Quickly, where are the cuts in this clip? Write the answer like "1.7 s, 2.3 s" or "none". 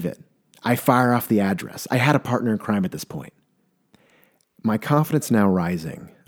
none